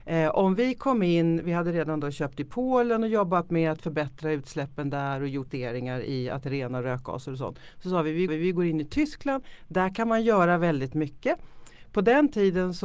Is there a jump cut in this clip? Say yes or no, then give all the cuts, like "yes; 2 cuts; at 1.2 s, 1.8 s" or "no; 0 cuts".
yes; 2 cuts; at 5.5 s, 8.3 s